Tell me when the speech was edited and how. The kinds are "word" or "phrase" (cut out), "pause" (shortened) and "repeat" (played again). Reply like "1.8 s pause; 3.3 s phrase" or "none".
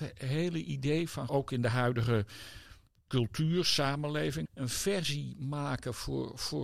1.3 s word; 2.9 s pause; 4.4 s word